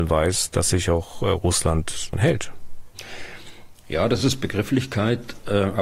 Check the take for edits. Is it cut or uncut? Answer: cut